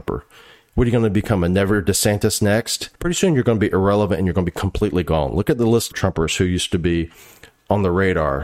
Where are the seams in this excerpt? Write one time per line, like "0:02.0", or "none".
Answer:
0:03.0
0:05.9